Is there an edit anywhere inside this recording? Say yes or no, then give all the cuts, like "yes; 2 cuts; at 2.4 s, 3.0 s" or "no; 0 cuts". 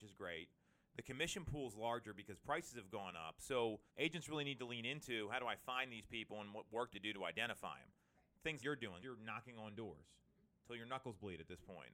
yes; 4 cuts; at 3.9 s, 6.9 s, 8.6 s, 9.0 s